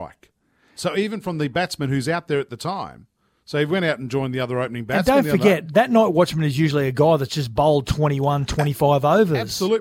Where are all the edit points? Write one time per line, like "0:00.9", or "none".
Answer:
none